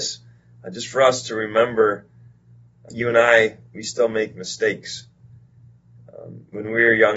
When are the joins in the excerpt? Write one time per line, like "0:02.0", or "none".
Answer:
0:02.9